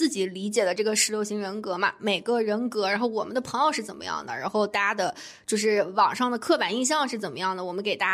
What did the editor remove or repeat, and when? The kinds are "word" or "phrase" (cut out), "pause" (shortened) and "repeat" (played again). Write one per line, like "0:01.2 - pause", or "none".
none